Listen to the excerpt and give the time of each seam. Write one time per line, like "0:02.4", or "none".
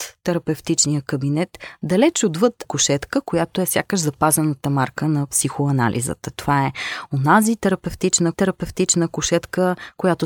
0:02.6
0:08.3